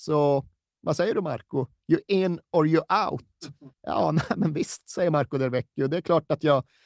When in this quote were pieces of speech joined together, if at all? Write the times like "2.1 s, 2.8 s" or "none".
3.7 s